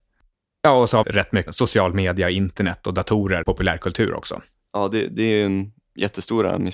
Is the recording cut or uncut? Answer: cut